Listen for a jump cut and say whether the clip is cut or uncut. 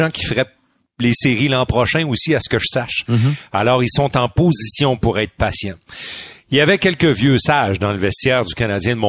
uncut